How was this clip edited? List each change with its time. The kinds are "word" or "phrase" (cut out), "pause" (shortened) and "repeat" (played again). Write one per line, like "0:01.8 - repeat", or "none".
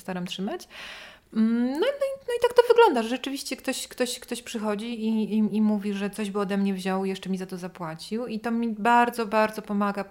none